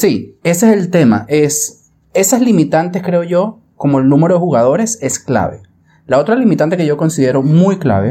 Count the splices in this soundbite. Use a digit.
0